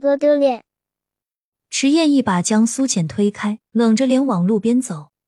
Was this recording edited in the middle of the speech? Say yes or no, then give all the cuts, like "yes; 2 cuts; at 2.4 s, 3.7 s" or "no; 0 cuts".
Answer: yes; 1 cut; at 3.7 s